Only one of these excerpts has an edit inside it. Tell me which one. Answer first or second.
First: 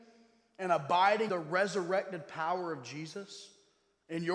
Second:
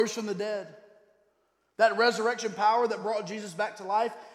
first